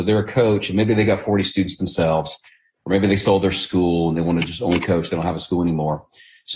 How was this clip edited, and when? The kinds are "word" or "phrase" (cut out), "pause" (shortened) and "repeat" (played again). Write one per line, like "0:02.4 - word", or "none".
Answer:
none